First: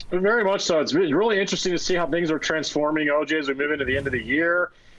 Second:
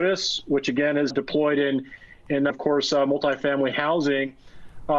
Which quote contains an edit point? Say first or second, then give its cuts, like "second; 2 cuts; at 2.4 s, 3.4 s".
second; 2 cuts; at 1.1 s, 2.5 s